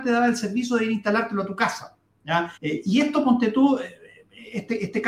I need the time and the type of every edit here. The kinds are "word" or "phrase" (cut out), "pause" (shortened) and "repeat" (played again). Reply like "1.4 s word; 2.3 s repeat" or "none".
2.6 s pause